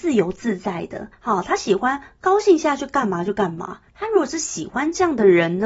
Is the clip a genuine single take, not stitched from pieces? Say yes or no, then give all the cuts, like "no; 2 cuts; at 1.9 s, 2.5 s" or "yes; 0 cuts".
no; 2 cuts; at 1.1 s, 3.9 s